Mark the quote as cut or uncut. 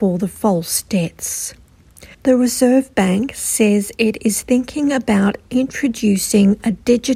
cut